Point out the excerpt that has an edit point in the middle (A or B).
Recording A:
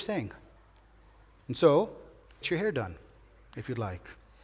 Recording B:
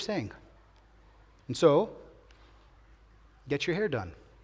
A